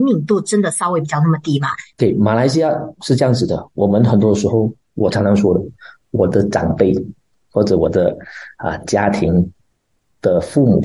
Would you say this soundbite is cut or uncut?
uncut